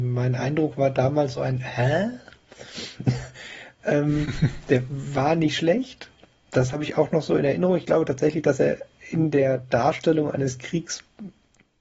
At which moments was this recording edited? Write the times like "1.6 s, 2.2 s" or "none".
none